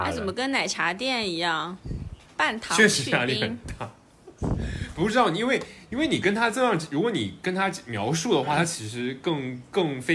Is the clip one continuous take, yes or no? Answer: yes